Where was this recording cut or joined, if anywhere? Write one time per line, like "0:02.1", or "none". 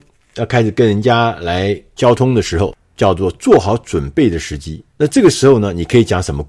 0:04.9